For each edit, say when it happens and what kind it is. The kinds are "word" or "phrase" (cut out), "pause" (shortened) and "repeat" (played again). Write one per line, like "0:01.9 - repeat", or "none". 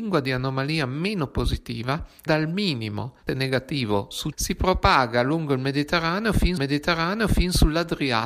0:02.3 - word
0:03.3 - word
0:04.3 - word
0:06.6 - repeat